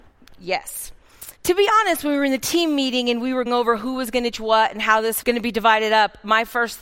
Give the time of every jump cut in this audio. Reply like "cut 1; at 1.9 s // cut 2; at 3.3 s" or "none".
cut 1; at 1.4 s // cut 2; at 3.5 s // cut 3; at 4.3 s // cut 4; at 5.2 s